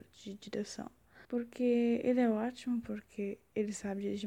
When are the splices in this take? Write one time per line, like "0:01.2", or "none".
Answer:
0:01.2